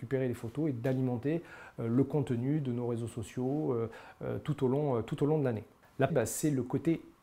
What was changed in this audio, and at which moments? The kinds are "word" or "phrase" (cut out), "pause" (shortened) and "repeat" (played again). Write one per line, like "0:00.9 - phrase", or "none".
0:06.1 - phrase